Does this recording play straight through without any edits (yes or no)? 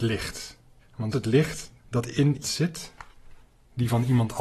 no